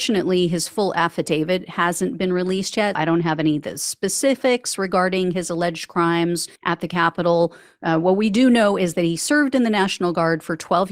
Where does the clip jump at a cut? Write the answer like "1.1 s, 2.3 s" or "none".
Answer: 2.9 s, 6.6 s